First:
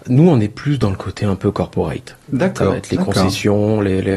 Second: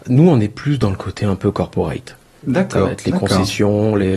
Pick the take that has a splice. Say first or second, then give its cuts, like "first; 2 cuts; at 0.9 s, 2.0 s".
first; 1 cut; at 2.2 s